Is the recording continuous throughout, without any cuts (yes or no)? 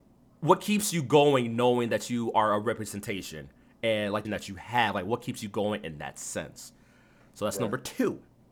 no